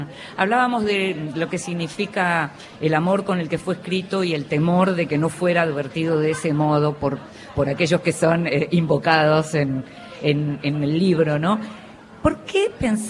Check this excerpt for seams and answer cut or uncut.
uncut